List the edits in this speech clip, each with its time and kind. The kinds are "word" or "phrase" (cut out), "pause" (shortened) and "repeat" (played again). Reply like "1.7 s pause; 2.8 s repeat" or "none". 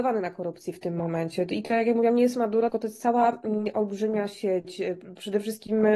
2.7 s word